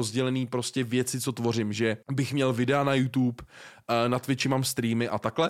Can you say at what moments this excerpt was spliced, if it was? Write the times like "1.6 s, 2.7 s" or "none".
2.0 s